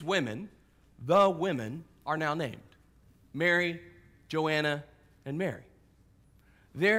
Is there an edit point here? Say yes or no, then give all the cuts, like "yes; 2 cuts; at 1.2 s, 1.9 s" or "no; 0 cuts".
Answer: no; 0 cuts